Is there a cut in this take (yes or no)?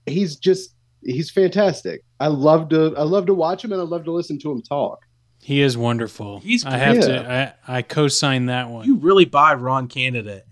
yes